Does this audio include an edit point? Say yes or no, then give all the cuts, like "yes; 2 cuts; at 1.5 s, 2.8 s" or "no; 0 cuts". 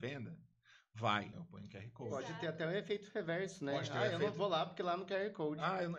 yes; 1 cut; at 1.3 s